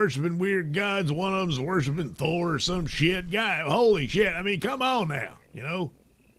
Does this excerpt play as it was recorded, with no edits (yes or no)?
no